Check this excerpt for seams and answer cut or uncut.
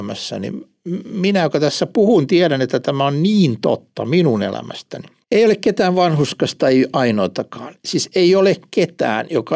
cut